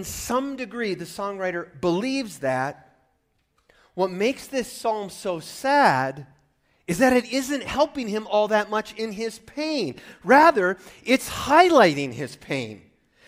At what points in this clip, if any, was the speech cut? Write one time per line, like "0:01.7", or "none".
none